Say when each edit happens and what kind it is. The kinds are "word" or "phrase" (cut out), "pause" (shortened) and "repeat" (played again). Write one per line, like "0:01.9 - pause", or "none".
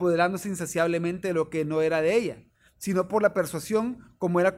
none